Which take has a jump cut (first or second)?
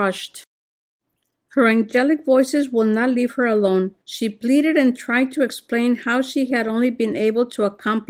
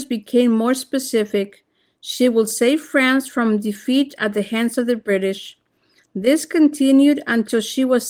first